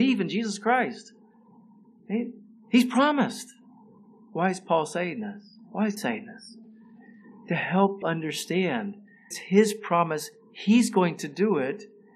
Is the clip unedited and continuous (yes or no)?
no